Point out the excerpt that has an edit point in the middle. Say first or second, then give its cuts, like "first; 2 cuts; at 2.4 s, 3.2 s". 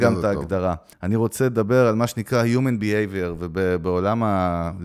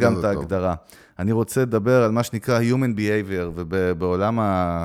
first; 1 cut; at 0.9 s